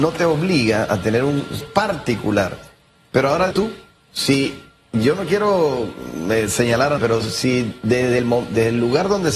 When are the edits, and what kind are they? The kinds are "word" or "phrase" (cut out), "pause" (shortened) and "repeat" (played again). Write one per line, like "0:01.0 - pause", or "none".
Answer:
0:01.6 - word
0:03.5 - word
0:07.0 - word